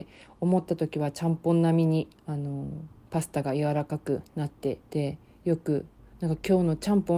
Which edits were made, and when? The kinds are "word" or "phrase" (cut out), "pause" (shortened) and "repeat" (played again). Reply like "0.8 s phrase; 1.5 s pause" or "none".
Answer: 2.2 s pause; 4.3 s pause; 4.8 s pause

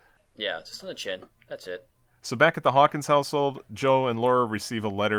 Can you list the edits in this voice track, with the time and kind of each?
none

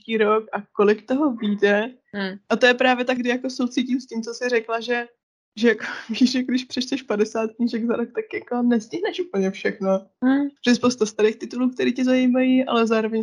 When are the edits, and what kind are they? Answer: 3.2 s word; 5.2 s pause; 10.6 s pause

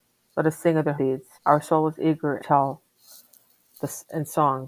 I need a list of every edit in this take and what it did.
1.0 s word; 1.4 s pause; 2.4 s phrase

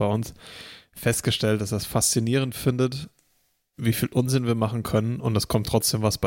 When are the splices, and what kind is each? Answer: none

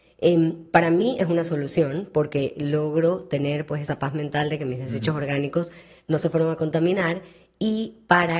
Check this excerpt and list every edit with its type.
none

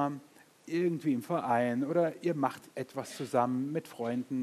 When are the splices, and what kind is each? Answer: 2.7 s pause

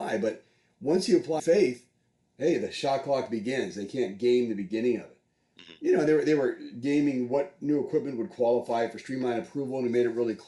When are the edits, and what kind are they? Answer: 1.4 s phrase

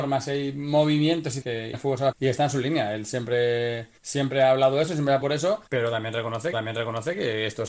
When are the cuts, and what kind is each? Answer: 1.4 s word; 1.7 s word; 2.1 s word; 4.0 s pause; 5.2 s word; 5.7 s pause; 6.5 s repeat

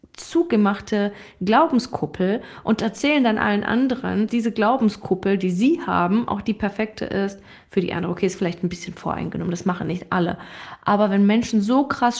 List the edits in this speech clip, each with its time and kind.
4.3 s word

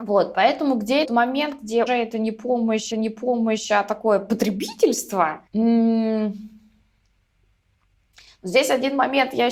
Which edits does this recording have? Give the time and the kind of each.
1.0 s word; 1.9 s word; 2.9 s repeat; 5.5 s pause

